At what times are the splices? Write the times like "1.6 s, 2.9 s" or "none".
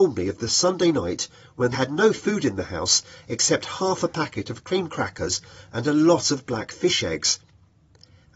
1.7 s